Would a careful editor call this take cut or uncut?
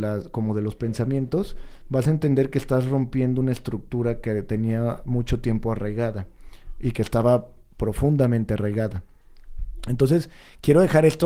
uncut